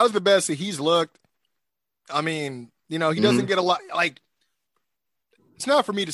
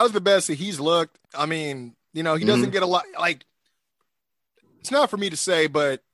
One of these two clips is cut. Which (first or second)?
second